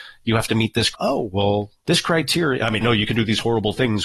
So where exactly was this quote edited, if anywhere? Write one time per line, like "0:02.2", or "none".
0:00.9
0:01.8
0:02.8